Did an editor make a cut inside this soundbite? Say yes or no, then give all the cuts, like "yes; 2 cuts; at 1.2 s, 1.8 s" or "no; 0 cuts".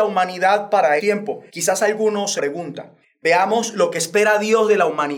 yes; 4 cuts; at 1.0 s, 1.5 s, 2.4 s, 3.0 s